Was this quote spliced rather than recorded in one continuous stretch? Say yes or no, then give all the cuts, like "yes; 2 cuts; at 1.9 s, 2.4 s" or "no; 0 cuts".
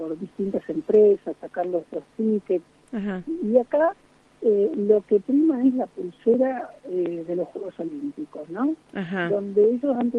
no; 0 cuts